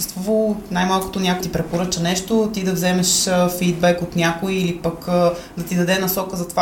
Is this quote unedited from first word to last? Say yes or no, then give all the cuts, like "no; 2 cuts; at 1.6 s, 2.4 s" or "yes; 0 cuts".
no; 1 cut; at 1.4 s